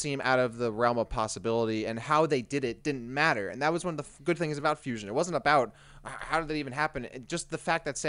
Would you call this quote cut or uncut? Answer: uncut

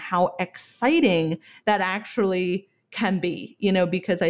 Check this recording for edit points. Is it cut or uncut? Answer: uncut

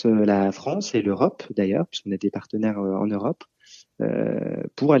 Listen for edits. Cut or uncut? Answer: uncut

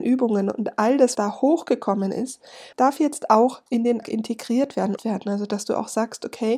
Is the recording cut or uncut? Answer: cut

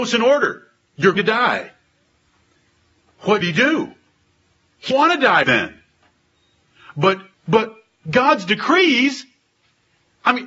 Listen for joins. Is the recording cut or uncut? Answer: cut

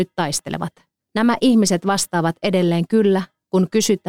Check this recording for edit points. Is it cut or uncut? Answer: cut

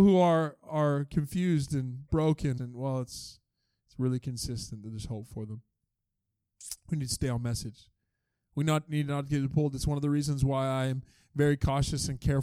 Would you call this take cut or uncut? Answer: cut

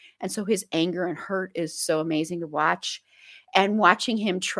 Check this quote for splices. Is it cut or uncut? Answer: uncut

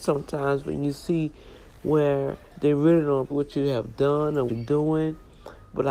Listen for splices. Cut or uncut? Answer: cut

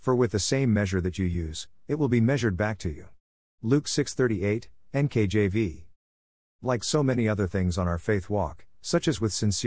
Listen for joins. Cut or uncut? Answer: uncut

